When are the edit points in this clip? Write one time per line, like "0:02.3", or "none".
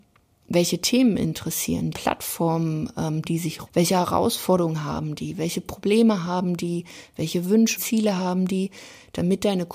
0:01.9
0:03.2
0:03.7
0:07.8